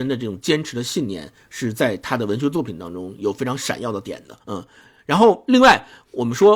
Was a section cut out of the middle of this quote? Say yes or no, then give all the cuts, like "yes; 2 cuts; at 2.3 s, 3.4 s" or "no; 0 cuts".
yes; 1 cut; at 4.4 s